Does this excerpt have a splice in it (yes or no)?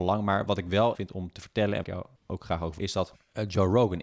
yes